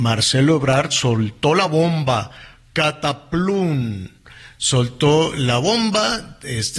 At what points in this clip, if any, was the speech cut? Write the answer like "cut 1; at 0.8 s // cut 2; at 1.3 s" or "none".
none